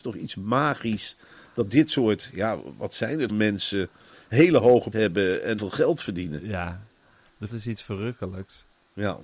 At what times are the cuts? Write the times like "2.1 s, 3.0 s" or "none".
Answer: 3.3 s, 4.9 s, 5.6 s, 7.5 s

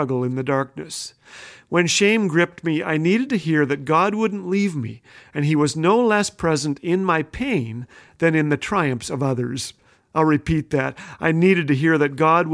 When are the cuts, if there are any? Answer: none

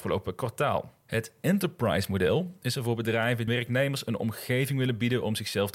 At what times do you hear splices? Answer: 1.0 s, 3.5 s

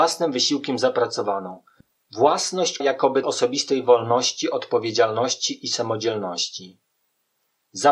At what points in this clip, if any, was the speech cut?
2.8 s, 3.2 s

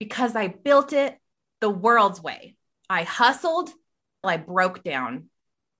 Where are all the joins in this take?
4.2 s

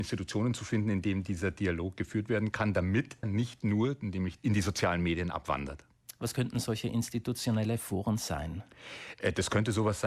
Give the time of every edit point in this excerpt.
3.2 s, 4.4 s

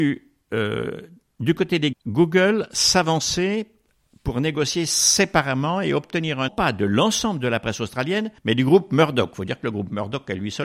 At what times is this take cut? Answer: 1.9 s, 6.5 s, 8.4 s

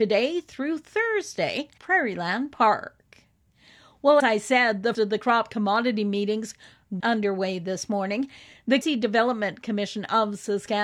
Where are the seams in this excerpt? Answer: 1.8 s, 4.2 s, 4.9 s, 7.0 s, 8.8 s

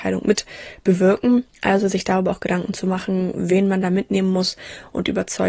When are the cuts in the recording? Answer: 1.5 s

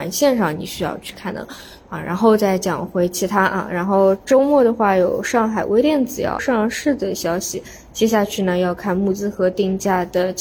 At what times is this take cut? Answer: 6.4 s

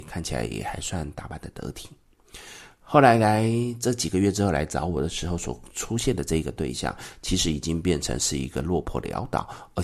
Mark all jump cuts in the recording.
none

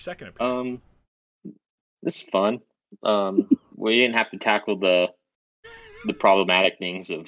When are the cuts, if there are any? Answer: none

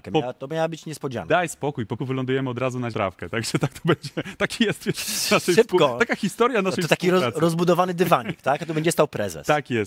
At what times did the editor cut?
2.0 s, 2.9 s, 4.9 s

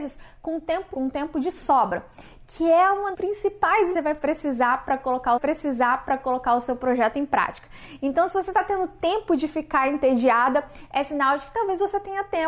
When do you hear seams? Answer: 0.9 s, 3.1 s, 3.9 s, 5.4 s

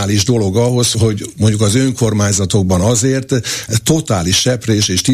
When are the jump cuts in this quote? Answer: 0.9 s

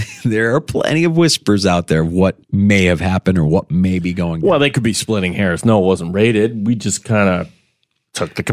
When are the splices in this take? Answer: 2.4 s

